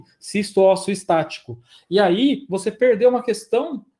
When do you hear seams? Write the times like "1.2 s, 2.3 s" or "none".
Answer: none